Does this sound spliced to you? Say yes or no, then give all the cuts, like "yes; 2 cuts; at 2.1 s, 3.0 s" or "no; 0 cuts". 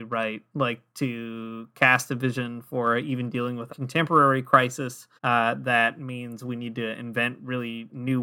yes; 2 cuts; at 3.7 s, 5.2 s